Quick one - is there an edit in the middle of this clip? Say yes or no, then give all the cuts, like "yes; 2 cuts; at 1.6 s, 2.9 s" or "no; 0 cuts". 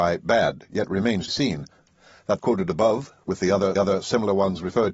yes; 3 cuts; at 1.3 s, 2.4 s, 3.8 s